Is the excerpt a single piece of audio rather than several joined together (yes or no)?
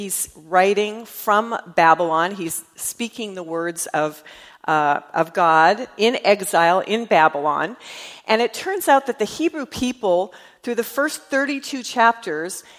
yes